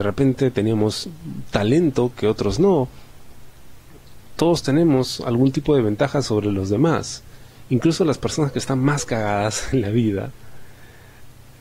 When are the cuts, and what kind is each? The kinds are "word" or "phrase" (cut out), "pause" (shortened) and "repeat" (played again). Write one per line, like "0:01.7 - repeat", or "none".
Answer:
none